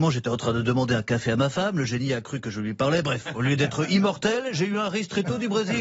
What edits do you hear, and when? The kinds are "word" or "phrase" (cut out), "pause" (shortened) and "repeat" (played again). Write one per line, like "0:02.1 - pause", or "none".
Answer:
none